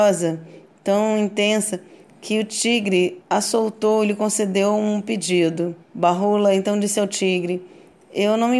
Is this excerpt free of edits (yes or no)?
no